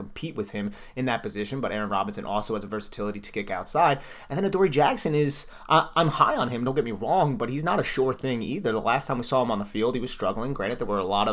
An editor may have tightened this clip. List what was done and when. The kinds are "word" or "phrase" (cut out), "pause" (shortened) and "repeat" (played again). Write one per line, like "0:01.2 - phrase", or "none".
none